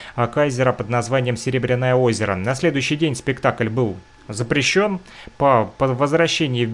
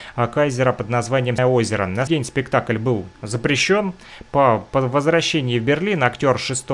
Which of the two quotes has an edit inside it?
second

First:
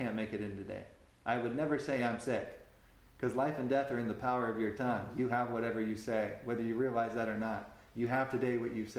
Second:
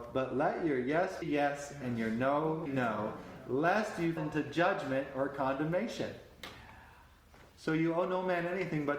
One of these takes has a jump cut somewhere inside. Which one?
second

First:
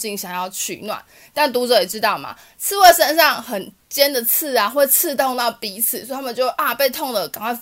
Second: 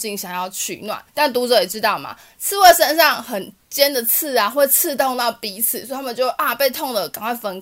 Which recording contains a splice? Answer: second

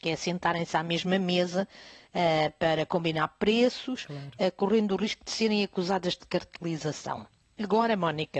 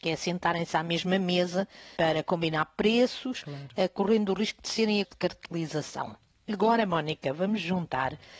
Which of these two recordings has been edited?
second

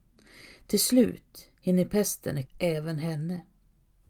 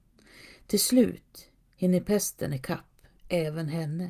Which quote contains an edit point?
first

